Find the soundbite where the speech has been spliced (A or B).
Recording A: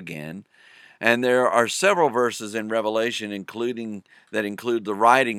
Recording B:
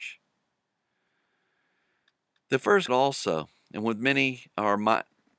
B